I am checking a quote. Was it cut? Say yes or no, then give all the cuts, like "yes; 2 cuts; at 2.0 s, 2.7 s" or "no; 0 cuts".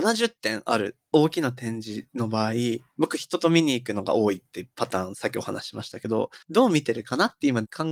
yes; 1 cut; at 6.4 s